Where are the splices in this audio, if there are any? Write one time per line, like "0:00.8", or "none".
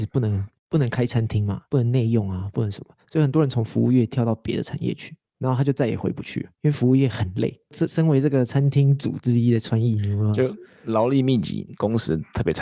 0:01.7
0:05.3
0:06.5